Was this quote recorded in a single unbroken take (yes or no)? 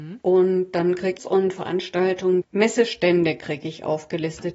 no